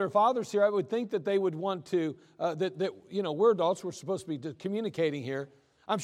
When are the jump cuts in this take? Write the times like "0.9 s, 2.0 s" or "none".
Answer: none